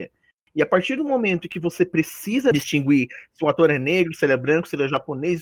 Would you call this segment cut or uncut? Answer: uncut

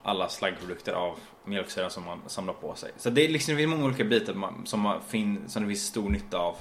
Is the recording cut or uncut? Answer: uncut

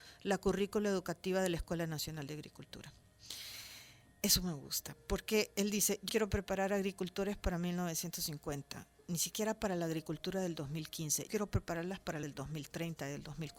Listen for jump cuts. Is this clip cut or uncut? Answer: cut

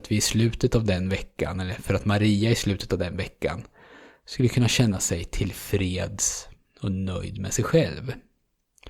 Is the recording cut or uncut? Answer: uncut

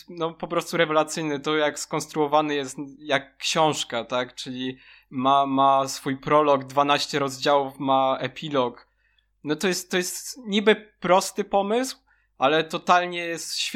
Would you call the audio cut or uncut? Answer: uncut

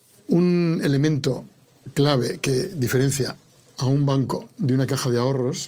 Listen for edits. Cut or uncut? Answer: uncut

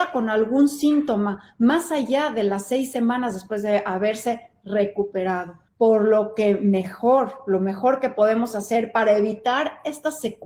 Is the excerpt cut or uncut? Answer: cut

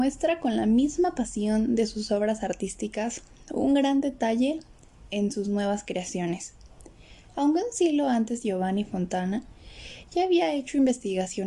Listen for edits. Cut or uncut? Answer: uncut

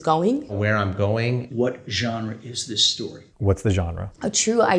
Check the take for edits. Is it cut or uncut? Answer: uncut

